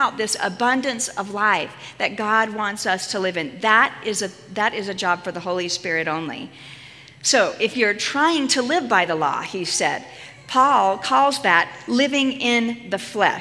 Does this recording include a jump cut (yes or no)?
no